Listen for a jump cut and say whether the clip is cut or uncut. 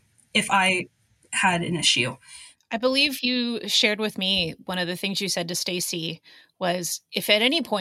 uncut